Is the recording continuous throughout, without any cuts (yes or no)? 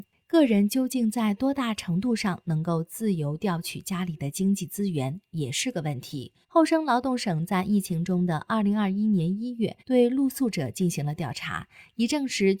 no